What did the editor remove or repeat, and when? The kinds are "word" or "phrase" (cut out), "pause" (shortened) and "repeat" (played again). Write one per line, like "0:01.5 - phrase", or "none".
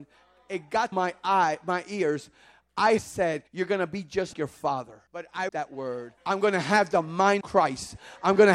0:00.9 - word
0:03.0 - phrase
0:03.5 - pause
0:04.3 - word
0:05.1 - pause
0:05.5 - word
0:06.2 - pause
0:07.4 - word